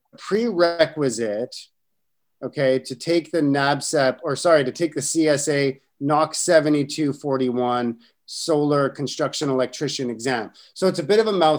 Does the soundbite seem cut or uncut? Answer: uncut